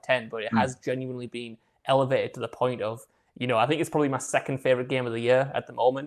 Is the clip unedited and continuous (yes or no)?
yes